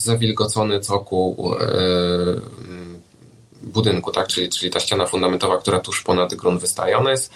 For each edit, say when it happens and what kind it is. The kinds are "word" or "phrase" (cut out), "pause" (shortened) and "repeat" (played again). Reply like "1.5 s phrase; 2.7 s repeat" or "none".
none